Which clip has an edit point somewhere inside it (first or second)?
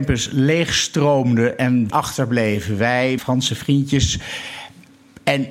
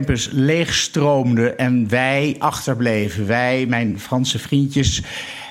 first